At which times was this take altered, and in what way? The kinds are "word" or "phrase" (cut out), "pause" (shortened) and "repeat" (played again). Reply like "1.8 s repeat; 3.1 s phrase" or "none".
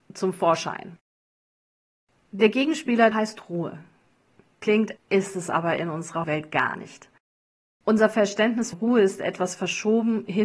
3.1 s word; 5.0 s word; 6.2 s word; 8.7 s word